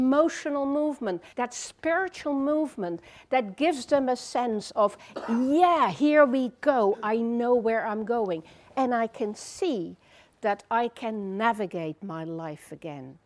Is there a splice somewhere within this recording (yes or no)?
yes